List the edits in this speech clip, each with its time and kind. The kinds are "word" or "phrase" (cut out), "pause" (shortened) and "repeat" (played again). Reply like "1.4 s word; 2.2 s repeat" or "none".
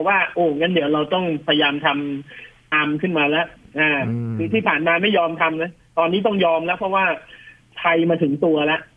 2.7 s word